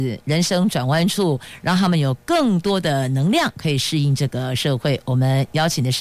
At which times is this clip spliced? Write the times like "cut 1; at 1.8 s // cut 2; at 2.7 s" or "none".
none